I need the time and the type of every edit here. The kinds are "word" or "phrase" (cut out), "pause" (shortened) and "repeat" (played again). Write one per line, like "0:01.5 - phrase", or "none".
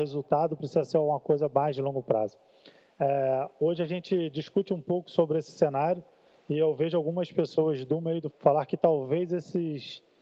0:08.3 - word